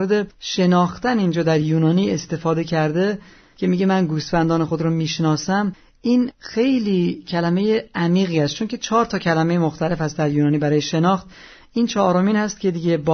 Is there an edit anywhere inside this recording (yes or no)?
no